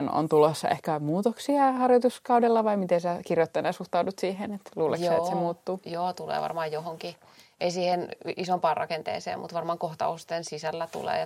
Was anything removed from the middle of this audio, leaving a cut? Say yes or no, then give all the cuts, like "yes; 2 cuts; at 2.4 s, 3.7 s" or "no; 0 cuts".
no; 0 cuts